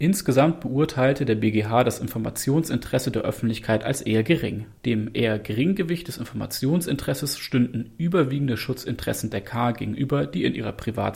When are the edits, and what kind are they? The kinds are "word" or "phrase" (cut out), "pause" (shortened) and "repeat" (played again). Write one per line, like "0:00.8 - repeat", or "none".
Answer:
0:04.8 - pause